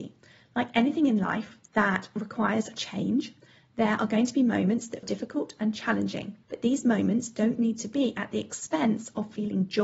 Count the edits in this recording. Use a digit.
3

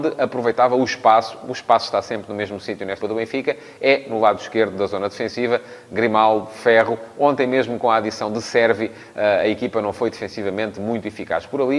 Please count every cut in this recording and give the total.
1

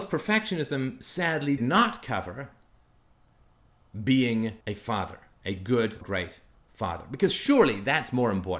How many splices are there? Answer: 3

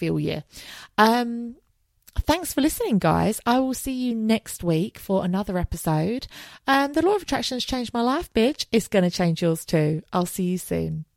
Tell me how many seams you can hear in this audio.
0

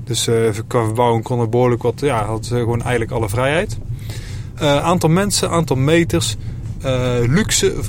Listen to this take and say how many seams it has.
0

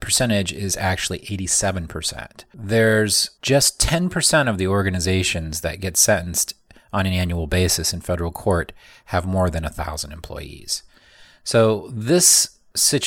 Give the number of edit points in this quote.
0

